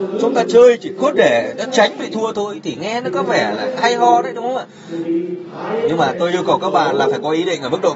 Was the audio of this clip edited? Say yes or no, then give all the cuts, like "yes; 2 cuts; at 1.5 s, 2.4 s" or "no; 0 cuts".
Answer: no; 0 cuts